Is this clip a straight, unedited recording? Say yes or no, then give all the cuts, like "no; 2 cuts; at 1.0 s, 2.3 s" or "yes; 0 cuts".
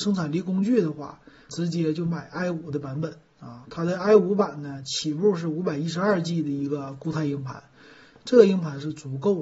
no; 1 cut; at 1.5 s